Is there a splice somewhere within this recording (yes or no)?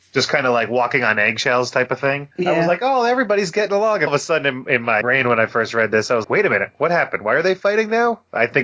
yes